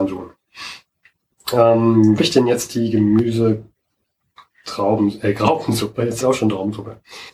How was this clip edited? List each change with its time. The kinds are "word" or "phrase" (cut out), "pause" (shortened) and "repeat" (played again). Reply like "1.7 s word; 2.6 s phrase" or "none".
2.2 s word; 6.2 s phrase